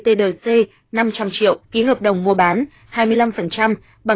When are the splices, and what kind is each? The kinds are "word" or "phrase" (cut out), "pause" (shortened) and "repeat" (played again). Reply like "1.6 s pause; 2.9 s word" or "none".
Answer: 1.6 s pause